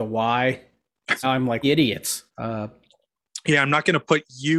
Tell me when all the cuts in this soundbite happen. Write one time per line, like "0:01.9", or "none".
0:01.2
0:01.6
0:02.3